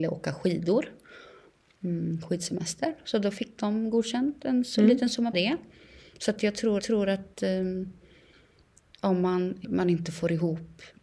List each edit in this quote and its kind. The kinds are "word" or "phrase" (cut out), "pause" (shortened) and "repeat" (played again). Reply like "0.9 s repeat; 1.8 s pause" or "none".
5.3 s phrase; 6.8 s repeat; 9.6 s phrase